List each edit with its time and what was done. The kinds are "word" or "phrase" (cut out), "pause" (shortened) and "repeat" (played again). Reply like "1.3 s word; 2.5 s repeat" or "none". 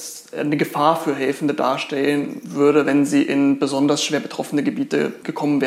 none